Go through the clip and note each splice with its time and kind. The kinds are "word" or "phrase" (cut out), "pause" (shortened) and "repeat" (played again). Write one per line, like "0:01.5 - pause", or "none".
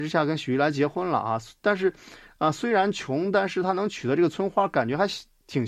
none